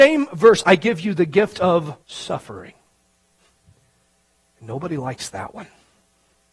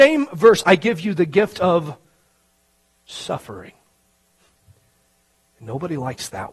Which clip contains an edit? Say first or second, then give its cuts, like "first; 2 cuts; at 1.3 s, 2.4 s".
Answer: first; 1 cut; at 2.0 s